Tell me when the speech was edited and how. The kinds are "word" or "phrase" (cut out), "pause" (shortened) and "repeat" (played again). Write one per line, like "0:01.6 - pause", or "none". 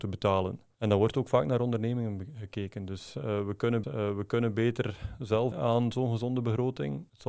0:03.8 - repeat
0:05.5 - word